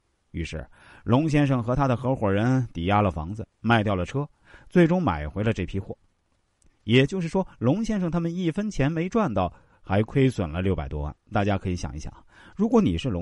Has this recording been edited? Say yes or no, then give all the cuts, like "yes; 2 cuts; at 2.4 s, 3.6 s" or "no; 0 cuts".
yes; 1 cut; at 11.2 s